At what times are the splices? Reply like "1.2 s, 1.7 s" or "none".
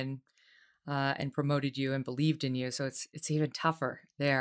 none